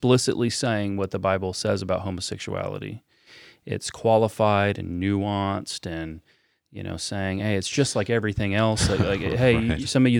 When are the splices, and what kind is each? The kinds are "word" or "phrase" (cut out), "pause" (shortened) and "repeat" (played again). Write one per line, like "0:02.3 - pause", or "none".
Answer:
none